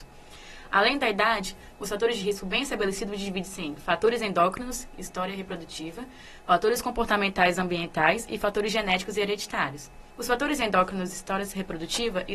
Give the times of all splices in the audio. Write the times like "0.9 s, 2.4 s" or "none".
10.1 s